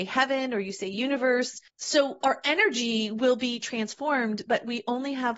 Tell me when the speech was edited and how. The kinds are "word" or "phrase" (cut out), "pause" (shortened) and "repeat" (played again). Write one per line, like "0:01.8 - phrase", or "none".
0:01.7 - pause